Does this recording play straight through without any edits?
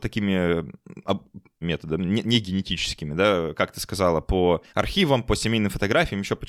no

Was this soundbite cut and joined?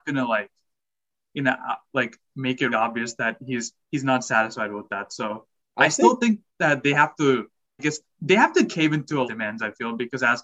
yes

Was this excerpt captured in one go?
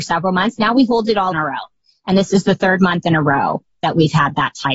no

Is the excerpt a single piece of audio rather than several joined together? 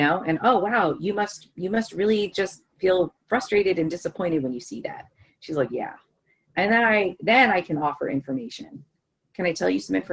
yes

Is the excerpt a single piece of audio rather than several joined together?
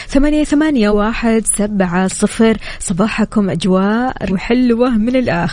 no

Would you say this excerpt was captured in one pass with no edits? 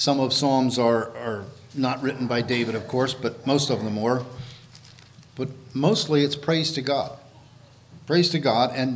yes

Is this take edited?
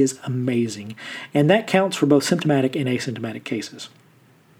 no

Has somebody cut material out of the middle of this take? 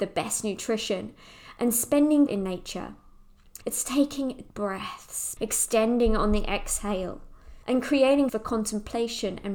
yes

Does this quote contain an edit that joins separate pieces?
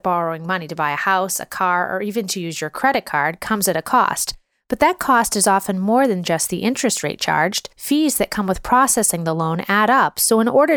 yes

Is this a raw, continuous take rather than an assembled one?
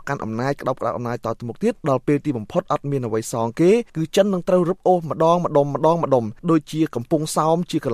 no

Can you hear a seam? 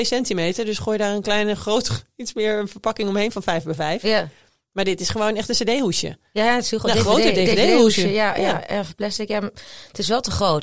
no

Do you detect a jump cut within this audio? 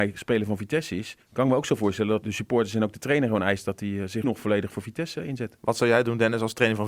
yes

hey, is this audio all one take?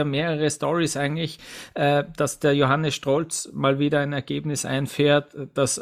yes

